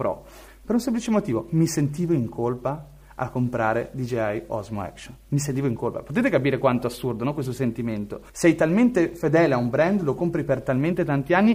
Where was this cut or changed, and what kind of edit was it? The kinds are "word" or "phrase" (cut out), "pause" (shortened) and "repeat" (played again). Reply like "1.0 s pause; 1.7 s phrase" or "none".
8.3 s pause